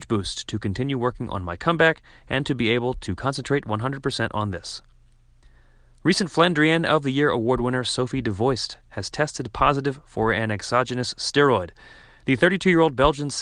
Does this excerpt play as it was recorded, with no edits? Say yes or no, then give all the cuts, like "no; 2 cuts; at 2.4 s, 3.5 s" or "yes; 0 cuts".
yes; 0 cuts